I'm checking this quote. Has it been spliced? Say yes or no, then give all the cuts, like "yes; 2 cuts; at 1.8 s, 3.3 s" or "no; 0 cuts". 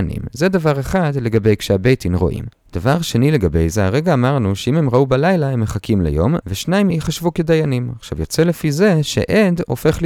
yes; 1 cut; at 6.9 s